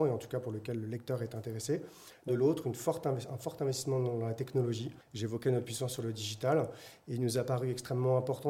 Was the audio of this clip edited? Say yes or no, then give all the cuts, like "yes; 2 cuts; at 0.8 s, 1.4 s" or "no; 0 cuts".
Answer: yes; 2 cuts; at 2.3 s, 5.0 s